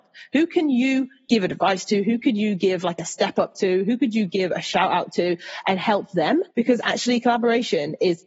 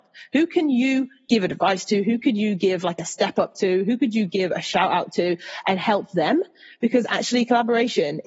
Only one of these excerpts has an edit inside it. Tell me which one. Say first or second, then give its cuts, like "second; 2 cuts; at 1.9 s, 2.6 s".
first; 1 cut; at 6.5 s